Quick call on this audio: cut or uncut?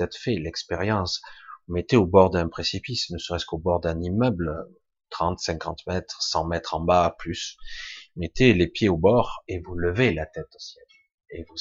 uncut